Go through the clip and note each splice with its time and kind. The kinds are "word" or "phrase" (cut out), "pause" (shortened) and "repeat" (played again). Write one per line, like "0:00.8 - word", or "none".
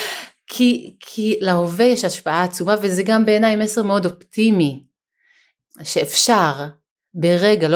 none